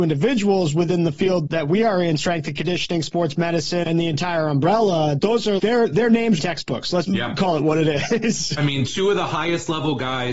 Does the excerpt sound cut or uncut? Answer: cut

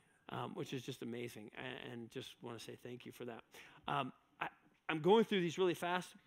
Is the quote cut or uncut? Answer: uncut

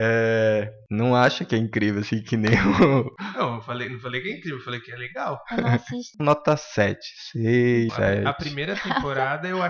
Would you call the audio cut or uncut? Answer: cut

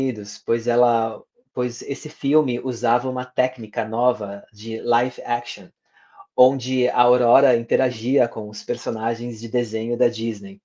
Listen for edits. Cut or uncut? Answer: uncut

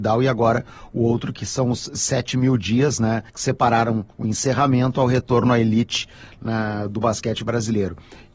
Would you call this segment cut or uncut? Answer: cut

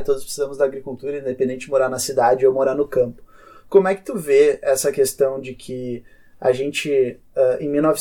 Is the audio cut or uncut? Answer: uncut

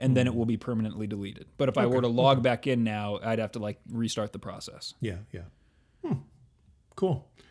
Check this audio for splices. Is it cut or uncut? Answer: uncut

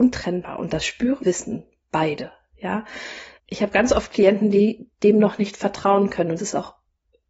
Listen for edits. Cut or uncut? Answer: cut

